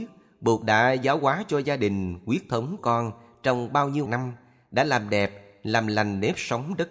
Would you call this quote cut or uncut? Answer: cut